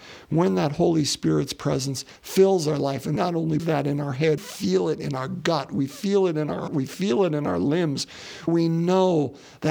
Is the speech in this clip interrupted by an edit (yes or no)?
yes